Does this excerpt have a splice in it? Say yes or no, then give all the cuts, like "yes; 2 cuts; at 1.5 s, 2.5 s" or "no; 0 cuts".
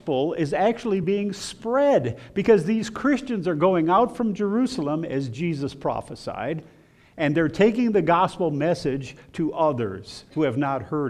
no; 0 cuts